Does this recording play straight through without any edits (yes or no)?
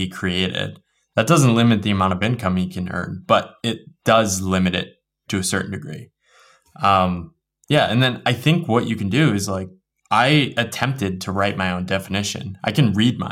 no